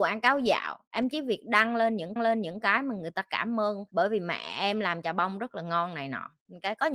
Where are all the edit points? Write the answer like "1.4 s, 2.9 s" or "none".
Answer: 2.2 s